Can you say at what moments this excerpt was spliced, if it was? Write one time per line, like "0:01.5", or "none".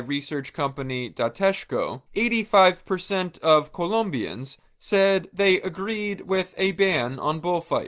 0:02.1